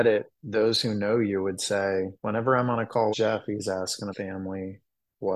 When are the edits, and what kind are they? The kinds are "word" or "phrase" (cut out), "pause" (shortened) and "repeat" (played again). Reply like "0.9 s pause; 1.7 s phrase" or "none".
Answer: 2.2 s pause; 3.1 s word; 4.1 s word

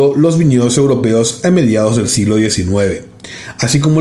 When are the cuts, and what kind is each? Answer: none

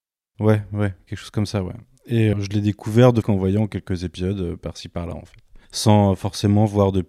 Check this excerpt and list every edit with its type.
2.3 s word; 3.2 s phrase; 5.6 s pause

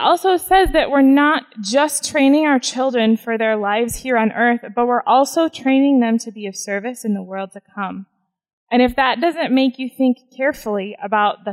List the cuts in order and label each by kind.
none

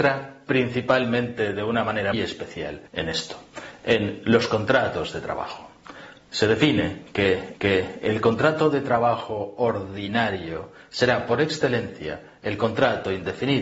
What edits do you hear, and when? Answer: 2.1 s word; 2.9 s pause; 7.5 s repeat

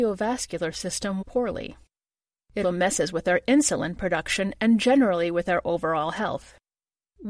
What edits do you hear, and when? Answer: 1.2 s word; 2.6 s word

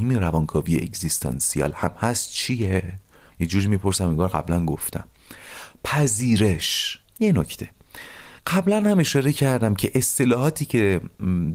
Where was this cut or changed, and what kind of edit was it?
3.3 s pause; 7.0 s pause; 8.4 s pause

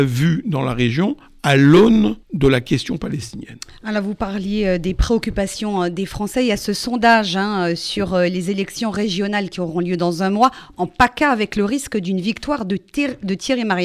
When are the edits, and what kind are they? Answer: 2.2 s pause

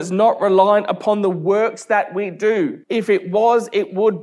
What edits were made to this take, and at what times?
2.8 s pause

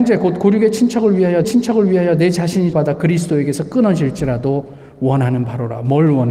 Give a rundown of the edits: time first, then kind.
1.4 s repeat; 2.7 s word

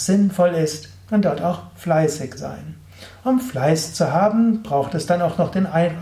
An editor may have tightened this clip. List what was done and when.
2.4 s word

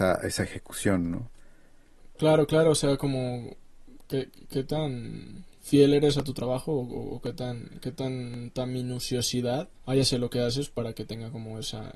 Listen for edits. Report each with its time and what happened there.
9.8 s pause

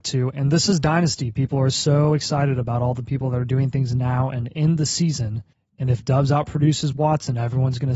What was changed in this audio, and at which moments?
5.5 s pause

